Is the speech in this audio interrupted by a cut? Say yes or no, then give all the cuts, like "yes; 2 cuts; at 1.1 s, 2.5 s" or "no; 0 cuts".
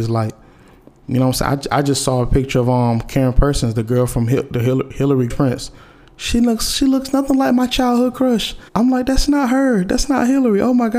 yes; 2 cuts; at 5.3 s, 8.7 s